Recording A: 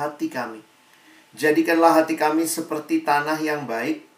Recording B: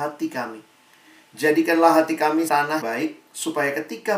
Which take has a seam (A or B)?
B